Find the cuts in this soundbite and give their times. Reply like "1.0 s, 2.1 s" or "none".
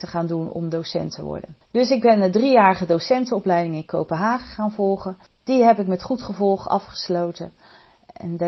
none